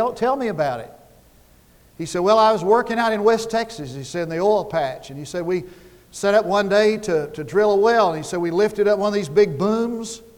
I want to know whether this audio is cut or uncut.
uncut